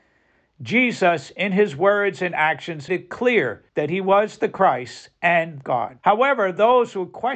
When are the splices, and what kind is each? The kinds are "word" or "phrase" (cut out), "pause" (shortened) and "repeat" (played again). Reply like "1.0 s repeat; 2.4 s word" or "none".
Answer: 2.9 s word; 3.7 s pause; 5.6 s phrase; 6.0 s pause